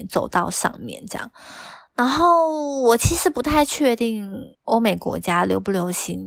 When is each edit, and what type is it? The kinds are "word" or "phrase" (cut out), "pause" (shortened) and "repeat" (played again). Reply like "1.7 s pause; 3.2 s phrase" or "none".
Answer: 4.5 s pause